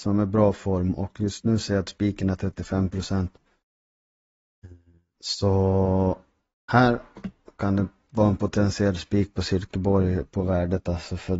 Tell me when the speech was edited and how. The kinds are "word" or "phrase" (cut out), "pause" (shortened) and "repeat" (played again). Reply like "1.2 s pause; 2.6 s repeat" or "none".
none